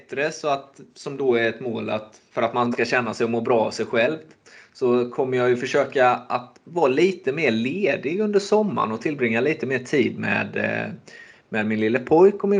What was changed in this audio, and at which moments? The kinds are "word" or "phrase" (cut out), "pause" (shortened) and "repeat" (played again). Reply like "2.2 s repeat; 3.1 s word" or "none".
2.7 s word